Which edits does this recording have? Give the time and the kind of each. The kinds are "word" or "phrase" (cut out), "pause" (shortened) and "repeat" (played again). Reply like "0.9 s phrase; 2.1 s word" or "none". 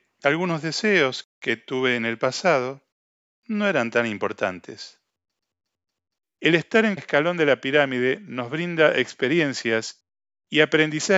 7.0 s word